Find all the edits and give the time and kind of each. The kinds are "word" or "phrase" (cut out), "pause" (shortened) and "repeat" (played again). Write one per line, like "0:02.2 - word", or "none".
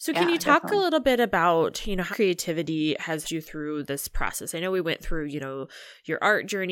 0:02.1 - word
0:03.2 - word